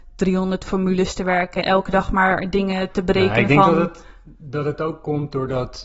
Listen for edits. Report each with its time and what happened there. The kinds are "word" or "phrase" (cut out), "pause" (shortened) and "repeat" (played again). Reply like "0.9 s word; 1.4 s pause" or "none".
1.6 s word